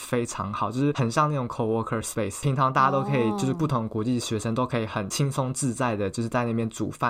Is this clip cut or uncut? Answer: uncut